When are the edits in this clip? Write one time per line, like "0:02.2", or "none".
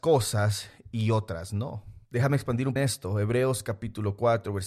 0:02.1
0:02.8